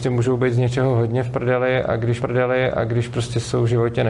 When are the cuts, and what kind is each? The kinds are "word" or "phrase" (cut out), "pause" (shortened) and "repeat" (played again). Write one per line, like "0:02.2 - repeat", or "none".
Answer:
0:02.2 - repeat

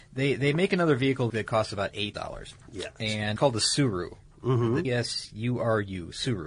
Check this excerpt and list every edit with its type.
0:01.3 - word
0:02.1 - word
0:03.4 - word
0:04.8 - word

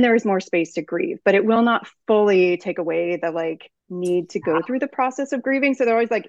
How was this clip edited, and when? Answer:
0:03.8 - pause

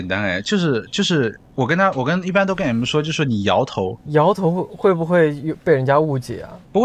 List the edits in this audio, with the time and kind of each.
0:04.0 - pause

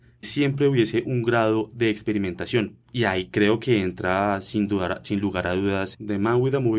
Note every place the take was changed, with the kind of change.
0:02.8 - pause

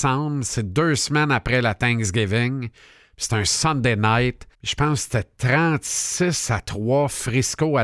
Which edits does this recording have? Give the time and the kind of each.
0:04.5 - pause

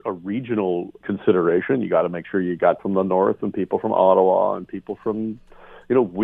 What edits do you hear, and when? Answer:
0:01.0 - word
0:02.8 - word

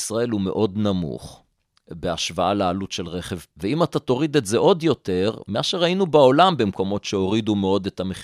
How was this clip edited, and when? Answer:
0:03.5 - word

